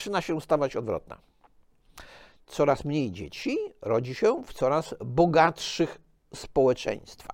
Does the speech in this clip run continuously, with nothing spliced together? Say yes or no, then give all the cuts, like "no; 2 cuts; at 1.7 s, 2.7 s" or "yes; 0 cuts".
yes; 0 cuts